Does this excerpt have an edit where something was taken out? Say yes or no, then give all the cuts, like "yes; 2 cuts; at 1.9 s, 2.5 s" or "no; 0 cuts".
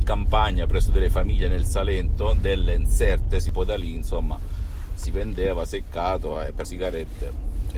yes; 1 cut; at 6.6 s